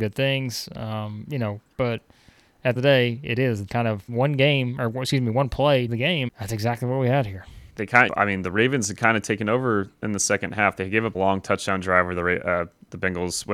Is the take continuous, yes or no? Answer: no